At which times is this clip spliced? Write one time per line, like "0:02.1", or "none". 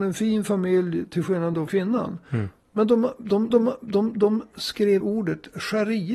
0:01.7
0:03.5
0:05.0